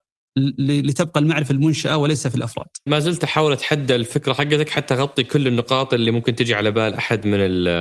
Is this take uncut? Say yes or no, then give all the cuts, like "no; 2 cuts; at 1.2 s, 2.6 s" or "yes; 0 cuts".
no; 2 cuts; at 1.5 s, 2.9 s